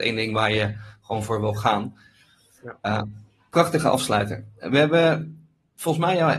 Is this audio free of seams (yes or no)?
yes